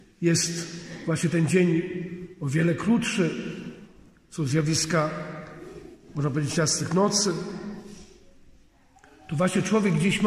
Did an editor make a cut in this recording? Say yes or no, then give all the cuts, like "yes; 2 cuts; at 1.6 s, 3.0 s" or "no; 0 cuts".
no; 0 cuts